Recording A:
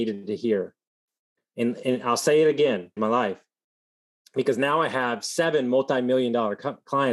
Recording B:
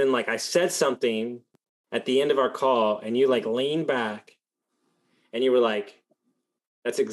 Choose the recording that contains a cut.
A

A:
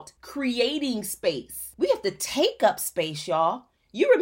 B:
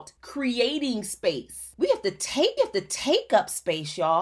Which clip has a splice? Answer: B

